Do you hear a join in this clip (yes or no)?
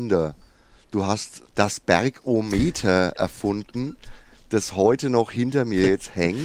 no